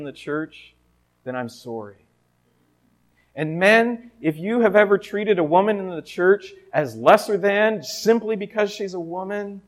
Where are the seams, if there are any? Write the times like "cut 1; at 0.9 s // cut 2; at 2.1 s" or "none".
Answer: none